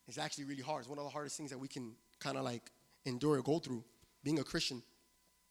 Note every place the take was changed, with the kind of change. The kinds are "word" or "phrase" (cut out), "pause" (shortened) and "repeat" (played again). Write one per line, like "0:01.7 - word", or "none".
none